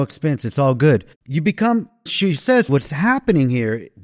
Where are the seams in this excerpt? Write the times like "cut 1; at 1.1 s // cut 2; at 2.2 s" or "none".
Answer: cut 1; at 1.1 s // cut 2; at 2.1 s // cut 3; at 2.7 s